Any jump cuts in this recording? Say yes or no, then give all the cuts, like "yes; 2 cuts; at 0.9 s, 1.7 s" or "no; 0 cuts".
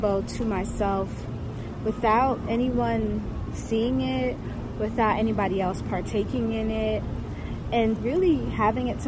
yes; 1 cut; at 8.0 s